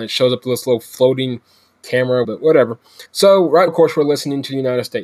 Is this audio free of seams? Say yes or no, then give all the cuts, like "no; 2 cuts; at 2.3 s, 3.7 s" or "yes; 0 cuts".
no; 3 cuts; at 2.2 s, 3.1 s, 3.7 s